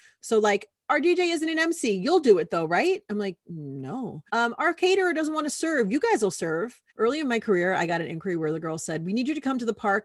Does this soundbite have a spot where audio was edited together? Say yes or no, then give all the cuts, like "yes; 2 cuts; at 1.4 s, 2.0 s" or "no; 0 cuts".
yes; 2 cuts; at 4.3 s, 6.9 s